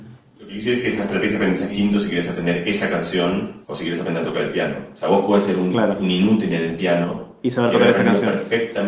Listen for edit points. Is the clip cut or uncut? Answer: cut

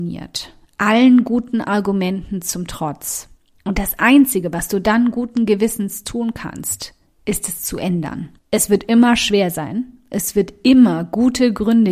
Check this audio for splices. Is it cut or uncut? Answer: cut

